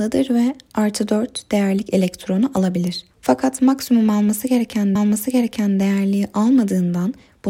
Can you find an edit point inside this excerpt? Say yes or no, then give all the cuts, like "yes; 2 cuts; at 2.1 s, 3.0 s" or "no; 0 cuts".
yes; 2 cuts; at 3.1 s, 5.0 s